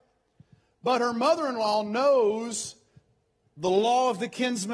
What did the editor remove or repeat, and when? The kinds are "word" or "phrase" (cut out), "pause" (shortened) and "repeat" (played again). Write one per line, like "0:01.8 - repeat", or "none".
none